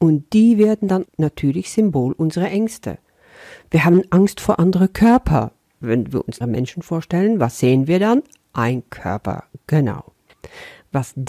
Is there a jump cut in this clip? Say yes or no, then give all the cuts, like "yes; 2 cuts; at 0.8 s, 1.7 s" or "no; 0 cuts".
yes; 2 cuts; at 1.0 s, 6.4 s